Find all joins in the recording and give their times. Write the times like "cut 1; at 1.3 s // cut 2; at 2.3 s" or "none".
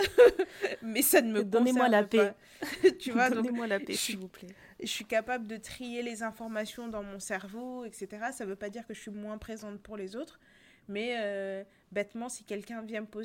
none